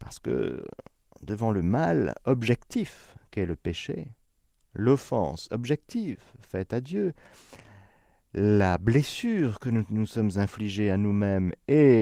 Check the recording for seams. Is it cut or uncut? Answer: uncut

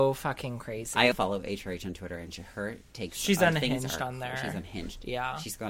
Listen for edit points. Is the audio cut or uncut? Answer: cut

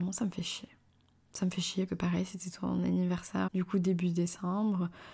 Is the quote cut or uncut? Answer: cut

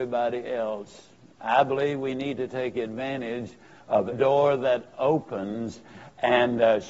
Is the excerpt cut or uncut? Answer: cut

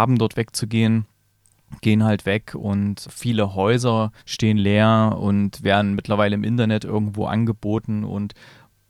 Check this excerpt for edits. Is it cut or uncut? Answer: cut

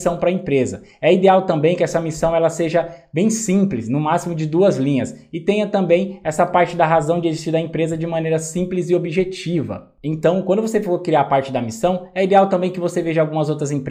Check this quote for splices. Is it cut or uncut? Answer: uncut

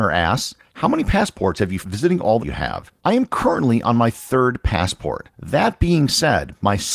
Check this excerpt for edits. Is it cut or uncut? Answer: cut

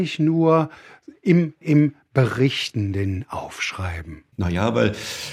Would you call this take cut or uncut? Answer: cut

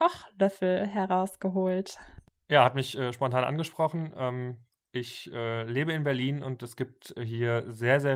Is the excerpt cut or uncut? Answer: uncut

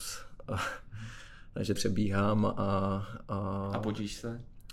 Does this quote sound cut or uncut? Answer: cut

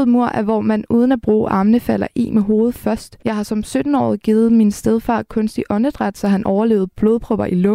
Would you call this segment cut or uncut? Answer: cut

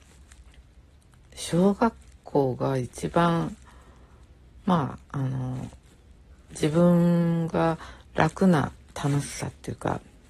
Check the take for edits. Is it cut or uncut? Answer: cut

